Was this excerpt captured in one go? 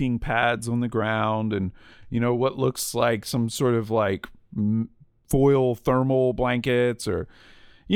yes; 0 cuts

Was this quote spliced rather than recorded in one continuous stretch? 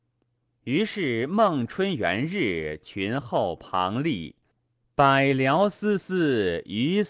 no; 0 cuts

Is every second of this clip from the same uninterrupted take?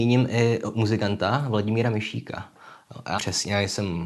no; 1 cut; at 3.2 s

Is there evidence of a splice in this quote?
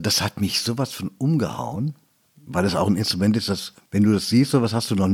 no; 0 cuts

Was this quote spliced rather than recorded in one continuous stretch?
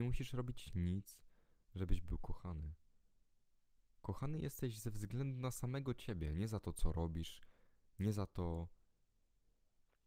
no; 0 cuts

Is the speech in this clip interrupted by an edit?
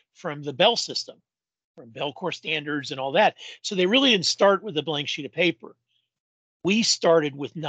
no; 0 cuts

